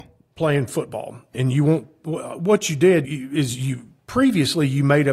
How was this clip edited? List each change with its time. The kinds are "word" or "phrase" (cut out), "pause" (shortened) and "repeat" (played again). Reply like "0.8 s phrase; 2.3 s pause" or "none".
1.3 s word; 3.0 s word